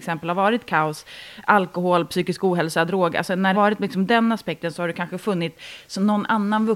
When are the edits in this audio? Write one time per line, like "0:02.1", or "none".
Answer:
0:03.5